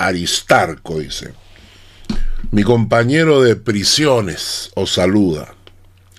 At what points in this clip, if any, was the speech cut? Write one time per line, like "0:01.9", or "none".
none

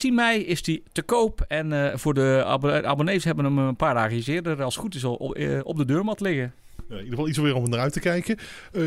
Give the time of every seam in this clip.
none

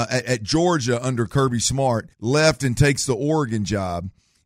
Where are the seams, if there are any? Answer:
0:02.1

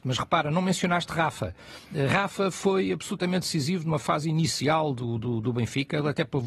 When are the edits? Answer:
none

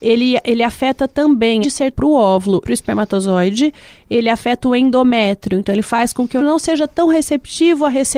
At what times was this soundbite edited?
0:01.6
0:01.9
0:02.6
0:06.4

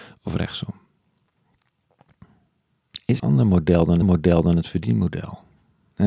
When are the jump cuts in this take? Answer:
0:03.2
0:04.0

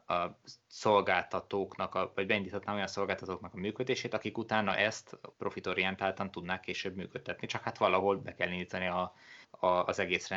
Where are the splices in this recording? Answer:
0:05.3
0:09.4

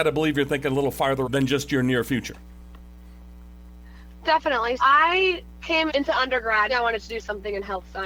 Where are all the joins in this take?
0:01.2
0:04.8
0:05.9
0:06.7

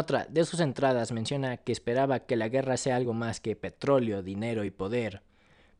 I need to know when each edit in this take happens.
none

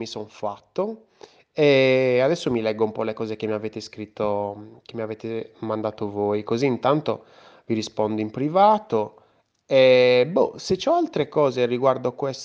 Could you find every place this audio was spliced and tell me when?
none

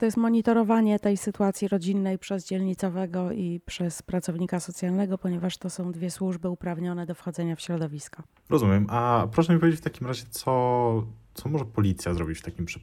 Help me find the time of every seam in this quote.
none

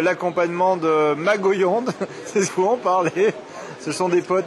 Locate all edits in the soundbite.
0:02.5

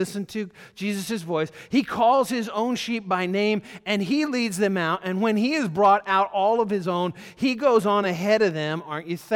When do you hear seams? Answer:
none

